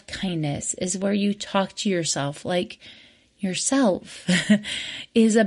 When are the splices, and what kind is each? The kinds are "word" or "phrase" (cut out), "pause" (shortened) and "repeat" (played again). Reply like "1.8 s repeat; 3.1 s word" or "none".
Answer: none